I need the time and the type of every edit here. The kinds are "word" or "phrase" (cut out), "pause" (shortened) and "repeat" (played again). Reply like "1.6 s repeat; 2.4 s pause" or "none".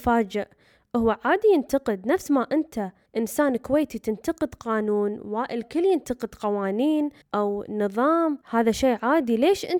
3.1 s pause; 7.2 s pause; 8.4 s pause